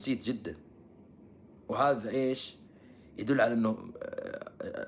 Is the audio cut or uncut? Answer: uncut